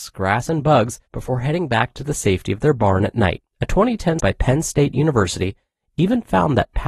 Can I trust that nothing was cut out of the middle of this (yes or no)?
no